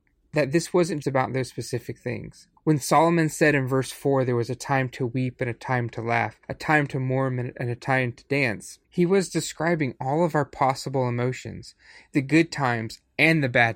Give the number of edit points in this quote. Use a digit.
4